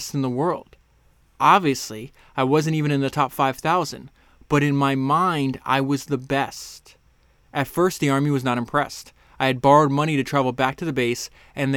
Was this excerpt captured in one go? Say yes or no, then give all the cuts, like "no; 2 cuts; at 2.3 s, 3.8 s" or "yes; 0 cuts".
yes; 0 cuts